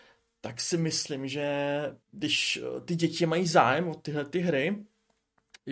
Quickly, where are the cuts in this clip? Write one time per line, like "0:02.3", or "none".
0:02.0